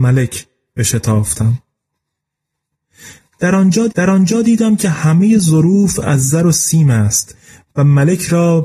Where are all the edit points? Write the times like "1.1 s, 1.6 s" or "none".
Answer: 3.9 s